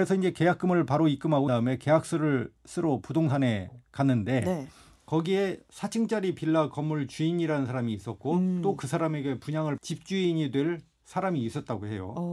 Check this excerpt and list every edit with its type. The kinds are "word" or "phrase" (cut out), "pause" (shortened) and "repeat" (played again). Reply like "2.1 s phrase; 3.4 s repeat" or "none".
1.5 s word; 9.8 s word

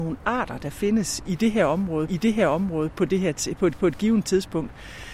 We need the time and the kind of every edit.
1.2 s word; 2.1 s repeat; 3.8 s repeat

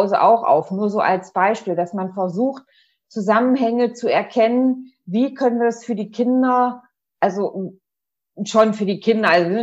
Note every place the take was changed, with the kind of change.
none

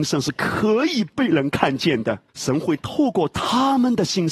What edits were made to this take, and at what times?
2.3 s pause

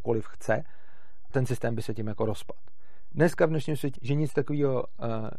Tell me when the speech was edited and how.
1.3 s word; 4.0 s word

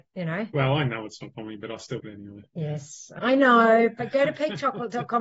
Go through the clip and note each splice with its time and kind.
1.3 s word; 2.0 s word; 3.2 s word

